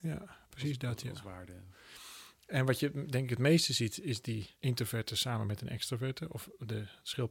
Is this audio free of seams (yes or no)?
no